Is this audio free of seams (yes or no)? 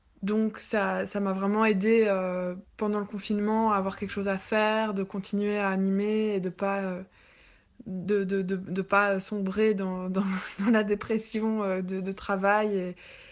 no